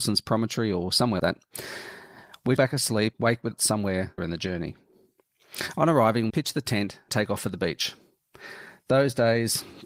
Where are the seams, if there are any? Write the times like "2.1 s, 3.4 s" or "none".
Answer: 1.2 s, 2.6 s, 3.1 s, 3.5 s, 4.2 s, 6.3 s, 7.1 s